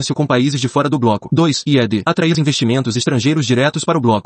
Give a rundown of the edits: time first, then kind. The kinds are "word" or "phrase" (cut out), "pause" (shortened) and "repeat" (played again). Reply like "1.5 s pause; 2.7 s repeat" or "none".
2.3 s word